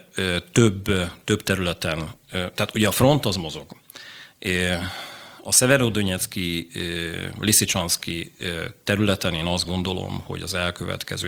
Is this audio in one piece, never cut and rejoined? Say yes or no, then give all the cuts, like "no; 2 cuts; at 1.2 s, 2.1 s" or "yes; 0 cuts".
yes; 0 cuts